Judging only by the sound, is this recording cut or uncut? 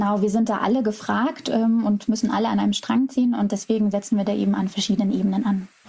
uncut